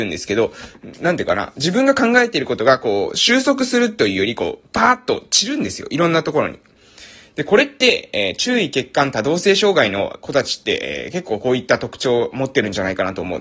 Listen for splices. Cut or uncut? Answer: uncut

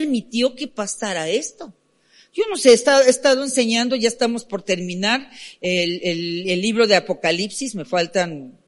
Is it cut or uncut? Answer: uncut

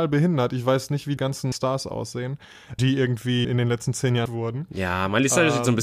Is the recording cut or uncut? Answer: cut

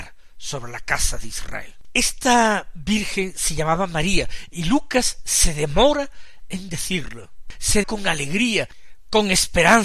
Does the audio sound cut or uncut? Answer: cut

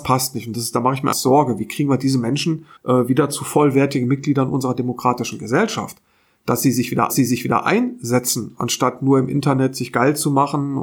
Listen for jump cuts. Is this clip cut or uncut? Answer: cut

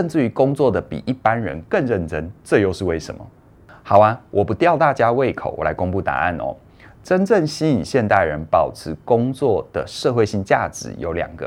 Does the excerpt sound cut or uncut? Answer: uncut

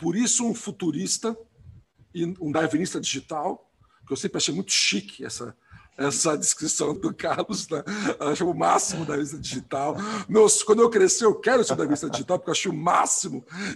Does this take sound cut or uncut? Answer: cut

